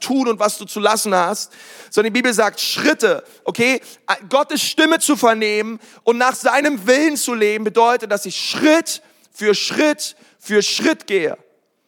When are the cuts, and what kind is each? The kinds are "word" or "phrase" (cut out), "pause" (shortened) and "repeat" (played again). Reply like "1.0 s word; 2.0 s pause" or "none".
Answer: none